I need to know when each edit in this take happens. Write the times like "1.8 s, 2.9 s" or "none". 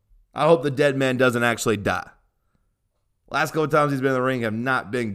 none